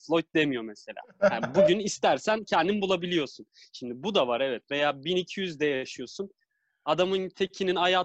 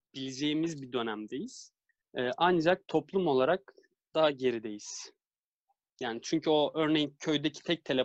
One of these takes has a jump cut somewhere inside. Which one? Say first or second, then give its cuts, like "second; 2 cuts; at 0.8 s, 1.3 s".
second; 1 cut; at 2.0 s